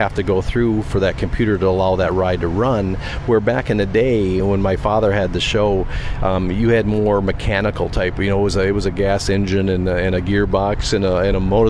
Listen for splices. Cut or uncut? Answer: uncut